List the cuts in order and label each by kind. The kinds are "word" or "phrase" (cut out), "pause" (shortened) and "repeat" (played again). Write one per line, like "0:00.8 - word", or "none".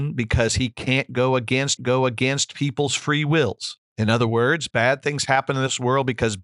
0:01.8 - repeat
0:03.9 - pause